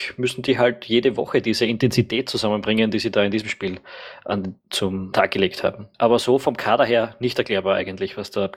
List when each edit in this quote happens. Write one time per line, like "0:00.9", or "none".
0:04.6
0:05.1
0:05.9